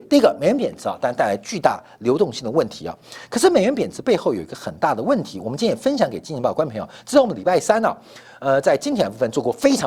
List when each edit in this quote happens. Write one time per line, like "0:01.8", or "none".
none